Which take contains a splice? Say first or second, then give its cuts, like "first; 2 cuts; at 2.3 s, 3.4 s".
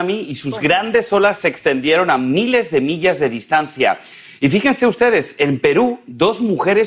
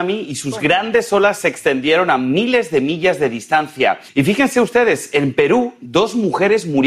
second; 1 cut; at 4.1 s